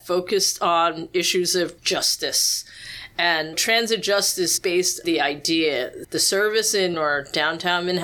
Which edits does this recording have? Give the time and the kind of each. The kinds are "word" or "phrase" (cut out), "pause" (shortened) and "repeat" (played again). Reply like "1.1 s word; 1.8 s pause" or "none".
1.8 s word; 3.5 s word; 4.6 s word; 5.0 s word; 6.0 s word; 6.9 s word